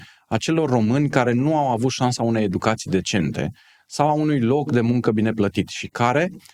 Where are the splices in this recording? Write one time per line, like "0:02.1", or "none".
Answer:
none

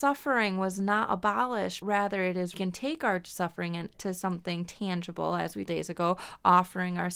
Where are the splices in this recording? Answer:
0:01.8
0:02.5
0:03.9
0:05.7

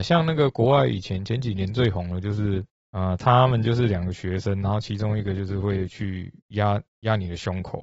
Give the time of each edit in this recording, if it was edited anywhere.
0:02.7
0:06.4

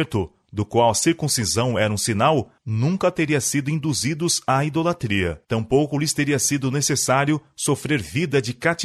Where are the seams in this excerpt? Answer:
0:02.6
0:05.4

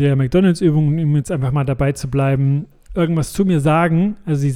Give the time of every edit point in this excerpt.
none

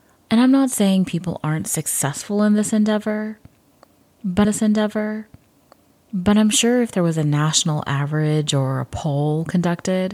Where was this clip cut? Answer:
0:04.4

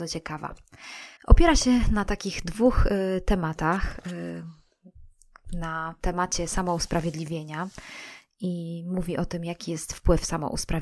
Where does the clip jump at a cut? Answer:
0:01.2

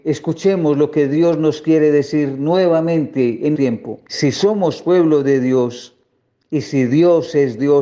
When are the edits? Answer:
0:03.5
0:04.1

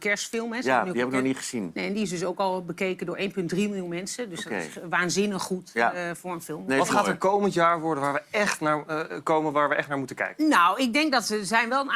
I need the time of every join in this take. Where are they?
none

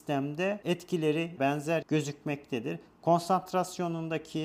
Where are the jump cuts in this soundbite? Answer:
0:01.4
0:01.8

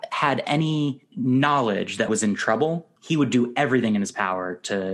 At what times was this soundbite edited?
0:02.1
0:03.0

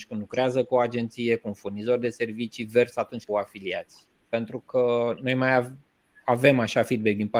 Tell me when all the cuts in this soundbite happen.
0:03.3

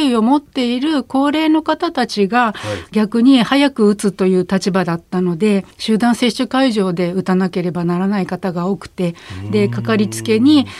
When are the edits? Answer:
0:05.7

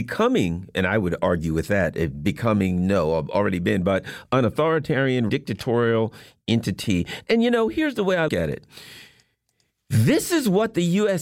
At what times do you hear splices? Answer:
0:05.3
0:08.3

